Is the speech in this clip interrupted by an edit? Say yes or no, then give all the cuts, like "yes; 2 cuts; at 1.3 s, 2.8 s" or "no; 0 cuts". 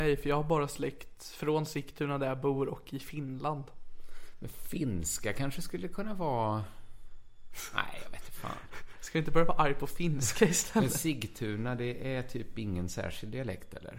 no; 0 cuts